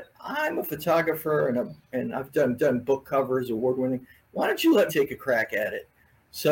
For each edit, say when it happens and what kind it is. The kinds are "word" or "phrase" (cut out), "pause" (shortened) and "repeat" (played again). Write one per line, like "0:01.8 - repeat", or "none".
0:02.6 - repeat
0:04.9 - word